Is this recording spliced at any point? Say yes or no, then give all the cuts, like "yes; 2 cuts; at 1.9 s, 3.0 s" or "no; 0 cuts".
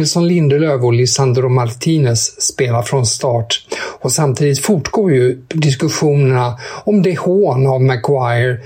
no; 0 cuts